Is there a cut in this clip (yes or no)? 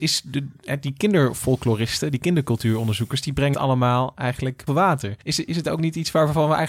yes